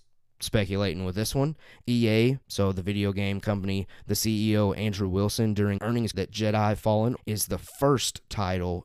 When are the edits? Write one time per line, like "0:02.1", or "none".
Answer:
0:02.4
0:05.8
0:06.1
0:07.2